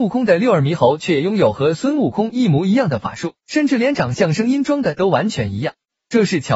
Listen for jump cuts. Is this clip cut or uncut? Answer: cut